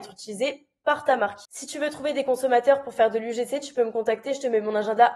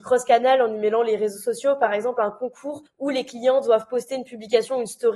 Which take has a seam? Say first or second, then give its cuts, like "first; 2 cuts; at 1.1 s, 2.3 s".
first; 1 cut; at 1.4 s